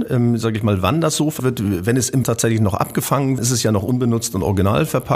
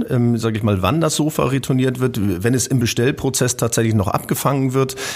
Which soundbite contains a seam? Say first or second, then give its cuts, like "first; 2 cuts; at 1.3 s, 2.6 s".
first; 3 cuts; at 1.4 s, 2.2 s, 3.4 s